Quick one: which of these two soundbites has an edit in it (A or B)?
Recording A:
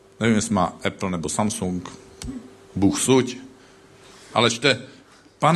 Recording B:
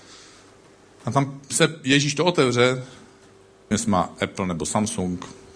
B